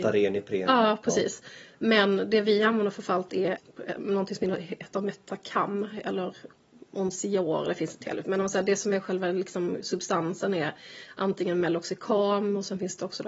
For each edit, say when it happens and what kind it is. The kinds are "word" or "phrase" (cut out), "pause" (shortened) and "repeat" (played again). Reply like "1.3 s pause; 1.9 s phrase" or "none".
none